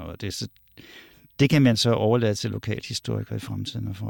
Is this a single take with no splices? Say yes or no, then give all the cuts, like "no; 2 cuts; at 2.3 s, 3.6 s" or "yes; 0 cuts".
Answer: yes; 0 cuts